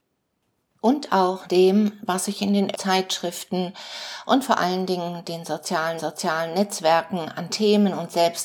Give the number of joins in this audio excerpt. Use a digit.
3